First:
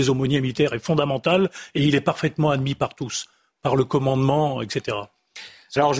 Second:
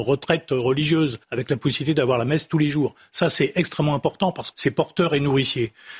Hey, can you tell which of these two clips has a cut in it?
second; 2 cuts; at 1.2 s, 4.5 s

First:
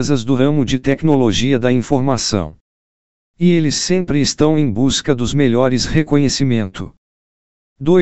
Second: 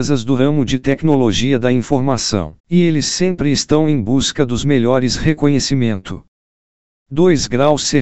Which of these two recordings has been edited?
second; 1 cut; at 2.6 s

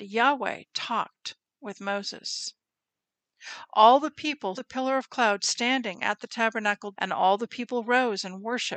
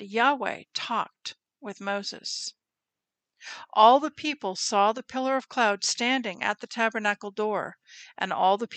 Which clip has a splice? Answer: first; 2 cuts; at 4.5 s, 6.9 s

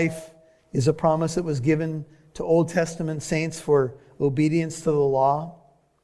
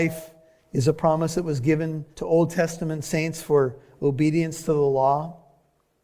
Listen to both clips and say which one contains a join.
second; 1 cut; at 2.1 s

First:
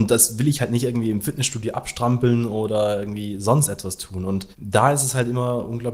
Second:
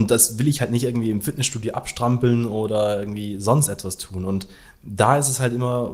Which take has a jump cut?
first; 1 cut; at 4.5 s

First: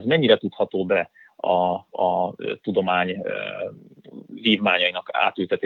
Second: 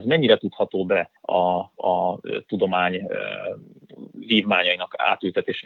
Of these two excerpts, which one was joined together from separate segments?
second; 1 cut; at 1.2 s

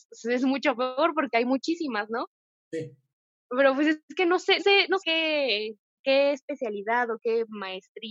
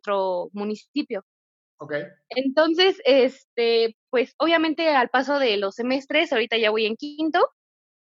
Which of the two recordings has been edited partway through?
first; 3 cuts; at 4.6 s, 5.0 s, 6.0 s

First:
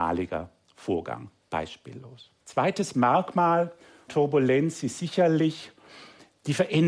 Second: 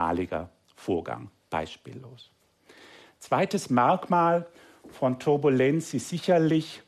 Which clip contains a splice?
first; 2 cuts; at 2.4 s, 4.1 s

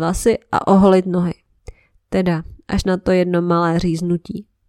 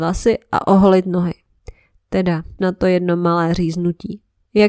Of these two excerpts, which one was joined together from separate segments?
second; 1 cut; at 2.6 s

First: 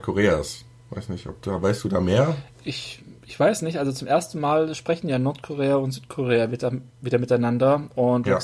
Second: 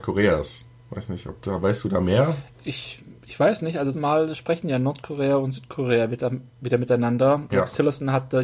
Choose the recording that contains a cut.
second; 2 cuts; at 3.9 s, 7.5 s

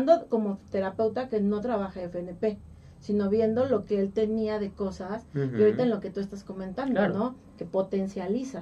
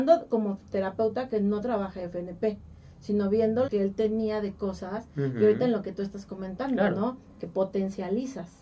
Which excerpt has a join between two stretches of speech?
second; 1 cut; at 3.7 s

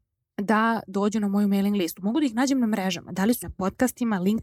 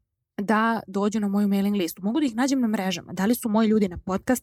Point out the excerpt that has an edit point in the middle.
first; 1 cut; at 3.4 s

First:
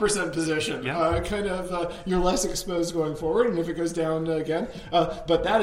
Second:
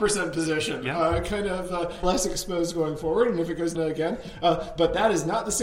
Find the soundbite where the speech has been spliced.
second; 2 cuts; at 2.0 s, 3.7 s

